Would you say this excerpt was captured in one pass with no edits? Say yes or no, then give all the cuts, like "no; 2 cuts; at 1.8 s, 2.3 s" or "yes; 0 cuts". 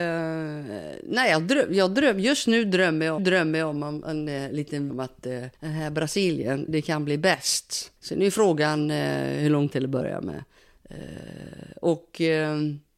no; 6 cuts; at 3.2 s, 4.9 s, 5.5 s, 6.7 s, 8.0 s, 9.7 s